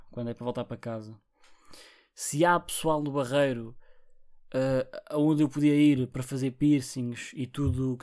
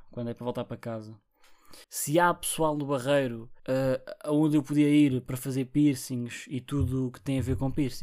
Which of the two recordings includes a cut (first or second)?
second